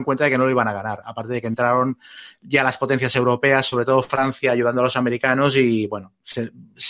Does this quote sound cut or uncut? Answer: uncut